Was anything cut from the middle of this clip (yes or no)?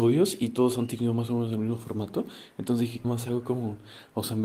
yes